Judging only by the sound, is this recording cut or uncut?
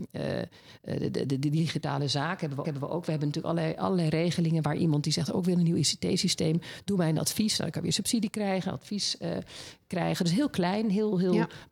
cut